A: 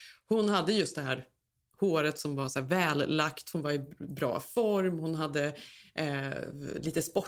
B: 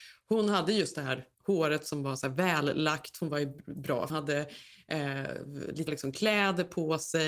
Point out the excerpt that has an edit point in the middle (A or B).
B